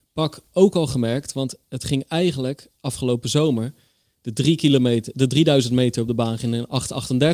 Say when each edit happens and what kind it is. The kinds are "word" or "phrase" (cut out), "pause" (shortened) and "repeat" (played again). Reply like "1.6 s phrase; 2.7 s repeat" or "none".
none